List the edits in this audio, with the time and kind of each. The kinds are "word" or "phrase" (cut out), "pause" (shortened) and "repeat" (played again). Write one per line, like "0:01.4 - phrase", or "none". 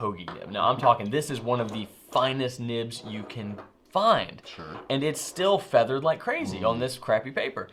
none

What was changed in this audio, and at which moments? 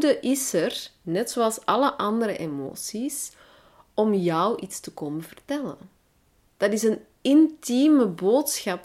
none

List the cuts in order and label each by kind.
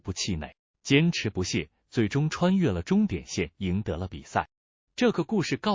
0:03.5 - pause

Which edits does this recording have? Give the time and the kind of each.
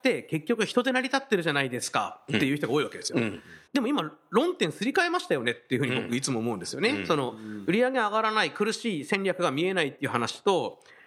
0:03.7 - pause

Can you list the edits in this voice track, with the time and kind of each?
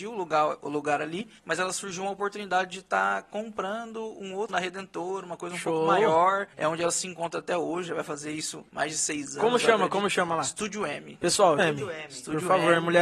0:01.4 - pause
0:04.5 - word
0:06.5 - pause
0:08.7 - pause
0:11.6 - word

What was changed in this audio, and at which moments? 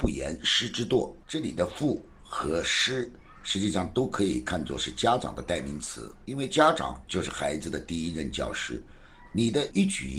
none

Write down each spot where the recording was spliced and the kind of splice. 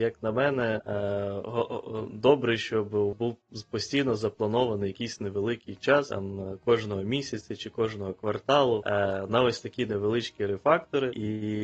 0:03.1 - word

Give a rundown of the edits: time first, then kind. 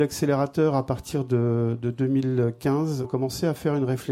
0:03.0 - phrase

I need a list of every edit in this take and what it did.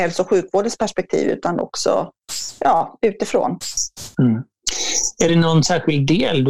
none

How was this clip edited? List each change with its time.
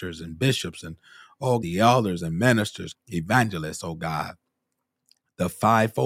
0:01.6 - word
0:02.9 - word

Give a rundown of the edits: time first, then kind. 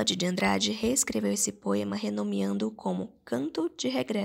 none

